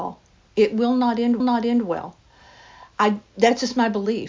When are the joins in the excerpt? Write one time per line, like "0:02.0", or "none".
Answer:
0:01.4